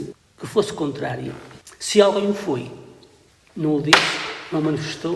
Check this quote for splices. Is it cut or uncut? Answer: uncut